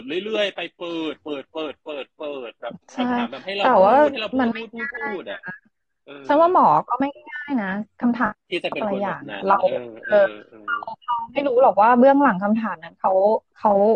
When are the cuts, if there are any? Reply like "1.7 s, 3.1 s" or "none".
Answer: 2.9 s